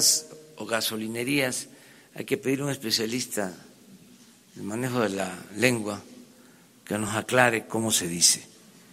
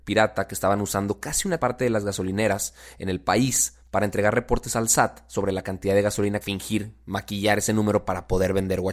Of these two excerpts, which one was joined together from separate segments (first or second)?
second